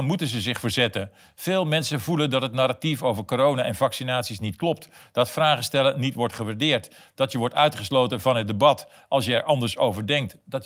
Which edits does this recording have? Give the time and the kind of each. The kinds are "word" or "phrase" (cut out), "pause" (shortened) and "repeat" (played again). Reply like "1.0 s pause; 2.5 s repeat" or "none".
none

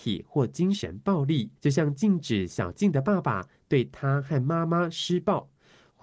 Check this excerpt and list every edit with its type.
1.6 s pause

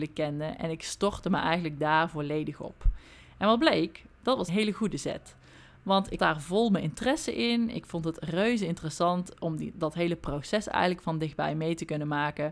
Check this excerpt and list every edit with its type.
4.5 s word; 6.2 s word

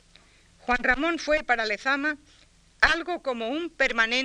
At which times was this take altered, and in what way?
none

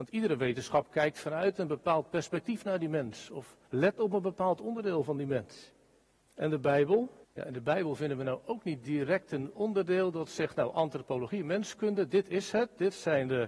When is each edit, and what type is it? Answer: 3.6 s pause; 6.0 s pause; 7.2 s pause

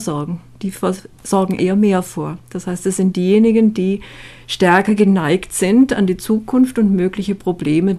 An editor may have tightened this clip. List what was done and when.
none

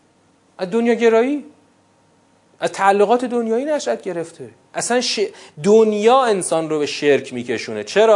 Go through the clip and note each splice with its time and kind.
none

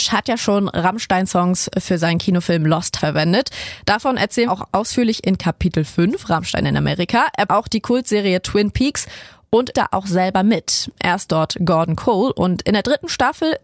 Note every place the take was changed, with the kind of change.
3.0 s word; 4.5 s phrase; 7.5 s phrase; 9.7 s word

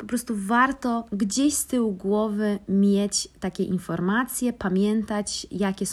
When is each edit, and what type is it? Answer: none

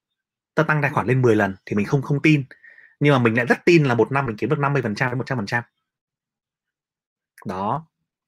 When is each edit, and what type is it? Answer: none

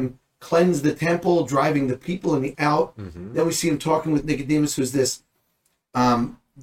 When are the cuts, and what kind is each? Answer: 2.5 s word

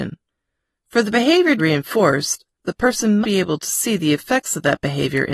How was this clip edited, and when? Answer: 1.6 s phrase; 2.5 s pause; 3.2 s word

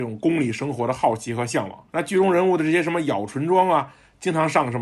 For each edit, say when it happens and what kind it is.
1.9 s pause

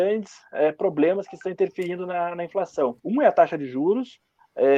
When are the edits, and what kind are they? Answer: 3.0 s pause

